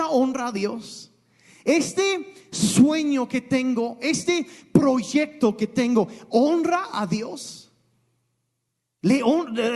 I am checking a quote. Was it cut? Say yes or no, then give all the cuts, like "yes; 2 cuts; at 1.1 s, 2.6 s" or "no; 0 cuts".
no; 0 cuts